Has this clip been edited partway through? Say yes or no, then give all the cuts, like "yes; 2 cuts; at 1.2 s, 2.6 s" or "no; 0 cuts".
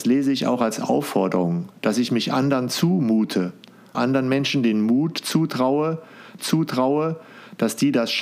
yes; 2 cuts; at 3.9 s, 6.4 s